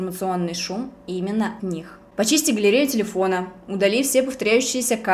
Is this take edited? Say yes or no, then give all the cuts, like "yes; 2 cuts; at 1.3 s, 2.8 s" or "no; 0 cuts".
yes; 1 cut; at 1.6 s